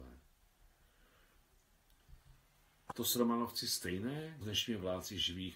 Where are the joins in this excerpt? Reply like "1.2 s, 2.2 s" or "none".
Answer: 2.9 s, 4.4 s